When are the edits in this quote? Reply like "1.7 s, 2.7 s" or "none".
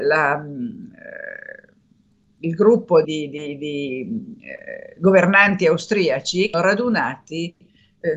3.0 s, 6.5 s